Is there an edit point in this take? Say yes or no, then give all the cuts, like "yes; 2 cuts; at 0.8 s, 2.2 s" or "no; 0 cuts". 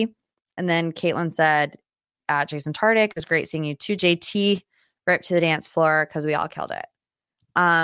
no; 0 cuts